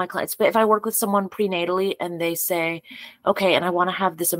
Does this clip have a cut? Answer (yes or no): no